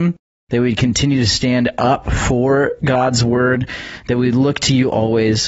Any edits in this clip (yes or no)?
no